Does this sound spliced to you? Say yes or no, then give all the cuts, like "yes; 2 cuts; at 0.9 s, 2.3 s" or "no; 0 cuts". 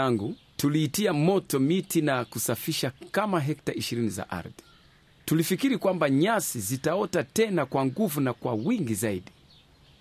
no; 0 cuts